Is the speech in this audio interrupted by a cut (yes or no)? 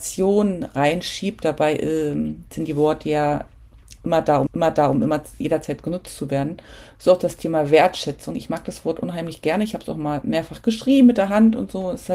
yes